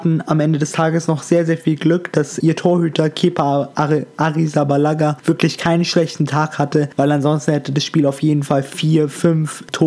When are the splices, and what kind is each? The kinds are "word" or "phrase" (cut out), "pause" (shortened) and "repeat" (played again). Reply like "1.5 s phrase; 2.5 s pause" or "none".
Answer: none